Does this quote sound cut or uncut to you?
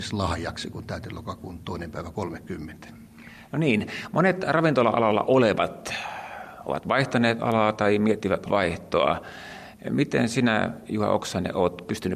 cut